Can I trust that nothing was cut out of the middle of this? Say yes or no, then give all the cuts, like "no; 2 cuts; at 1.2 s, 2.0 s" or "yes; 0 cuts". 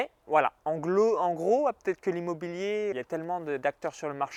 no; 1 cut; at 2.9 s